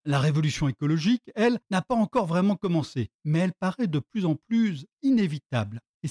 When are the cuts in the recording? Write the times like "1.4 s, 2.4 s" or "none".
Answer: 3.1 s, 4.9 s